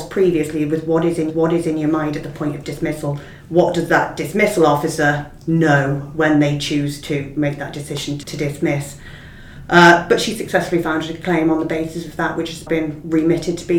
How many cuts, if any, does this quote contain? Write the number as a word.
four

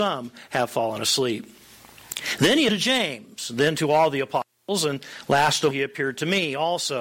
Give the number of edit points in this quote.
two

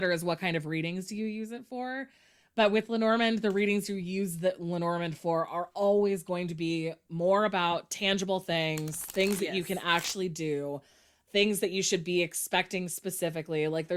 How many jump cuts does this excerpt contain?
zero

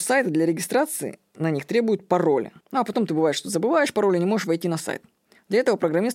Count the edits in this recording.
one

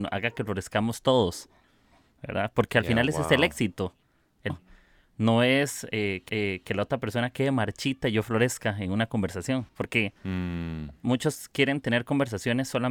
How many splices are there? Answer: three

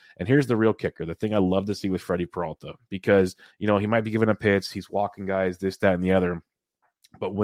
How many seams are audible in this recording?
one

